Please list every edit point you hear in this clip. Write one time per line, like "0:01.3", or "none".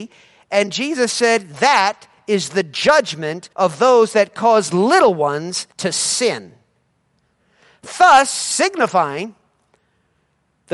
0:03.5
0:05.7